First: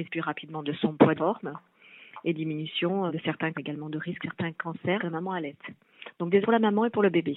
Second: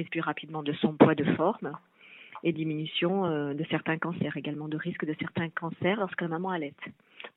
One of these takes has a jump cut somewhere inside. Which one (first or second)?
first